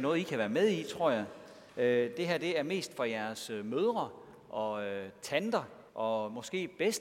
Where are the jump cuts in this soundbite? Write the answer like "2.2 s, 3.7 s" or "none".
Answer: 1.7 s, 5.9 s